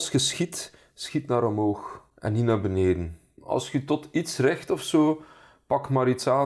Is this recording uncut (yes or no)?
yes